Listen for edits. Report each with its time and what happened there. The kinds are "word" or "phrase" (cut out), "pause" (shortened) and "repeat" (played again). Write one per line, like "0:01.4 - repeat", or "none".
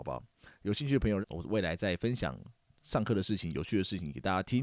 0:01.2 - phrase
0:02.7 - pause

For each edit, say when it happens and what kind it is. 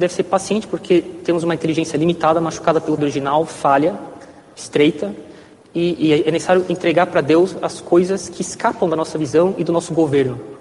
0:03.0 - word

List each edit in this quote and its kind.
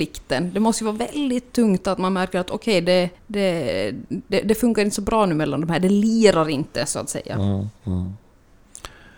0:03.1 - pause

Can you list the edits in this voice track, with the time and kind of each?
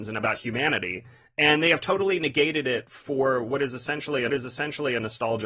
0:04.3 - repeat

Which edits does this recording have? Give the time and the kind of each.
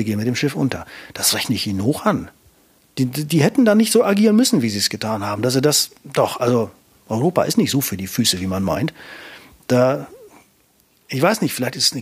none

